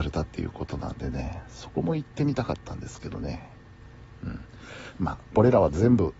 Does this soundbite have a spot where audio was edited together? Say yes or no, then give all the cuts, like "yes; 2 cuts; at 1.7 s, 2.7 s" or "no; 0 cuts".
no; 0 cuts